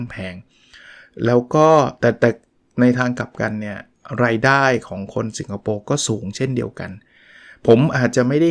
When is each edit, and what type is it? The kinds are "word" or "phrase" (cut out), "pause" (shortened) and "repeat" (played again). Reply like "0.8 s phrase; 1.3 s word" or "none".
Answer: none